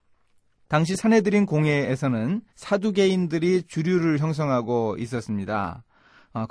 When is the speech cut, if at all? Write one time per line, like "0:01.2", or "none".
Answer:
0:02.5